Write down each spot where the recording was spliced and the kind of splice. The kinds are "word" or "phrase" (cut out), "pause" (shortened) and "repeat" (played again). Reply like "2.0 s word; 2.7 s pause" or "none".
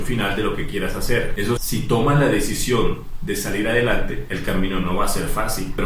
1.6 s word